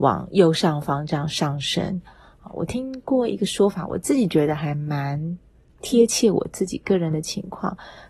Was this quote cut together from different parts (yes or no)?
no